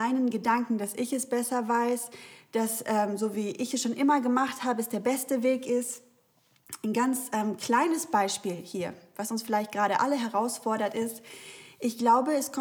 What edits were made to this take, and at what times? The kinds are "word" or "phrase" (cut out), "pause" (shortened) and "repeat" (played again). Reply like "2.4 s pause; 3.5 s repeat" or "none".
none